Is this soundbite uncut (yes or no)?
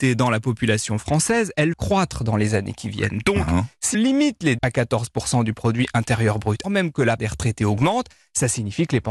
no